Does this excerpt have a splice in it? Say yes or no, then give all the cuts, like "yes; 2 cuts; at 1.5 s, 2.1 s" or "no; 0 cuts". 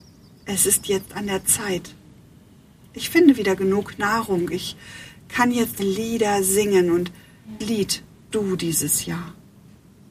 yes; 3 cuts; at 5.8 s, 7.6 s, 8.3 s